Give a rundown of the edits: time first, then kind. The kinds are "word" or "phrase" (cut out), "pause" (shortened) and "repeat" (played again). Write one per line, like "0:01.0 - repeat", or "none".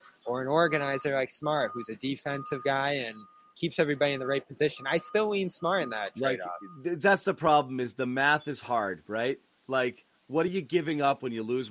none